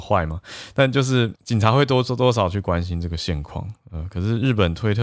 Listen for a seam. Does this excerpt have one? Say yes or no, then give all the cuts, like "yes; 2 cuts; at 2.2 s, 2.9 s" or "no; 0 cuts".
yes; 1 cut; at 1.4 s